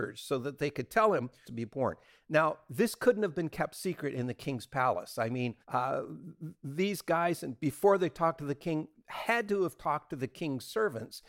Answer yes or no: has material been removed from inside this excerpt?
yes